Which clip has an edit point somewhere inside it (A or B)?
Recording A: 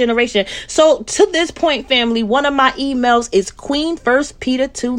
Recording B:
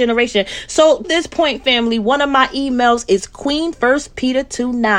B